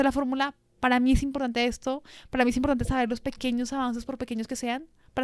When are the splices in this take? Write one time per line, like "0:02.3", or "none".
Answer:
none